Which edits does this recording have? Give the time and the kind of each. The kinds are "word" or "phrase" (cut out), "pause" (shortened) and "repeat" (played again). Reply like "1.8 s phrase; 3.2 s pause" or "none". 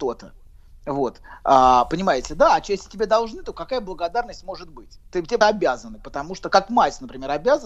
5.1 s pause; 5.4 s word